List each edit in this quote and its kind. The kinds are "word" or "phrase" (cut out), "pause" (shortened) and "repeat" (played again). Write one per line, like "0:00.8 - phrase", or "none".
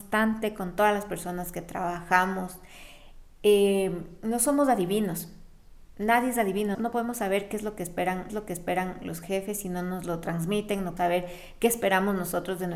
0:06.7 - word
0:08.3 - repeat
0:11.0 - word